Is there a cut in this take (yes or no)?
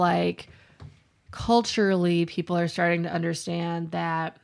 no